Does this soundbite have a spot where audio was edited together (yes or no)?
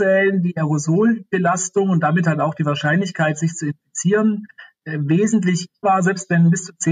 yes